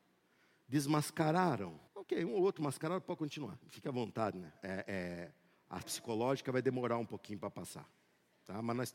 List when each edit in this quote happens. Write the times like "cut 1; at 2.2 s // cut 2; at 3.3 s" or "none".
cut 1; at 1.9 s // cut 2; at 3.6 s // cut 3; at 5.8 s